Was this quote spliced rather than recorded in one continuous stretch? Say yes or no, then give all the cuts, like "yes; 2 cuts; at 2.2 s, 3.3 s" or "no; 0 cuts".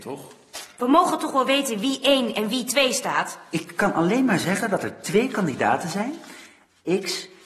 no; 0 cuts